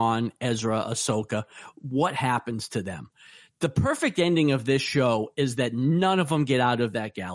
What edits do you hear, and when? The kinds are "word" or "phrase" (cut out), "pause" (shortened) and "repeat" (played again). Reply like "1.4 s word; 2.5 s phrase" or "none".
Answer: none